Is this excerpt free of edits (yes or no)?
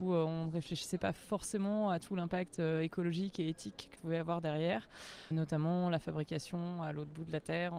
no